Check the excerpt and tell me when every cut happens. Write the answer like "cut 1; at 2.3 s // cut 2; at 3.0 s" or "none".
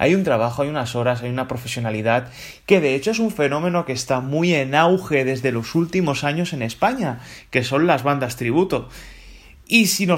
none

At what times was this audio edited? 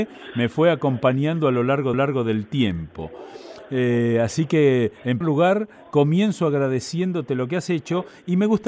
cut 1; at 1.9 s // cut 2; at 5.2 s

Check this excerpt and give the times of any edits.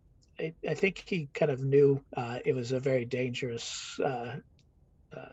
cut 1; at 2.1 s

